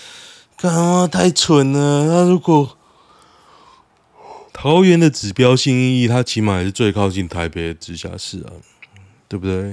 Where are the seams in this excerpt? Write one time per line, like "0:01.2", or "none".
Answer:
0:04.5